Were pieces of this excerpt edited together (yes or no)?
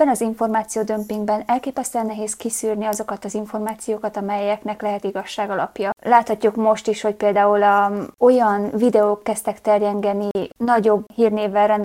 no